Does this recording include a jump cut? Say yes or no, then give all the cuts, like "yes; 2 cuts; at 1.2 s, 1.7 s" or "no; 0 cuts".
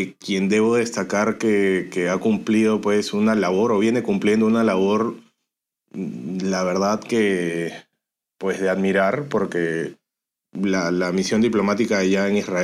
no; 0 cuts